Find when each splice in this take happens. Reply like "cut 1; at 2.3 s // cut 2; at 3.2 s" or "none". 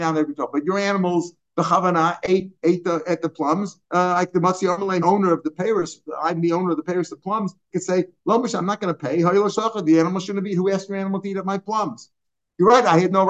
cut 1; at 3.8 s // cut 2; at 5.0 s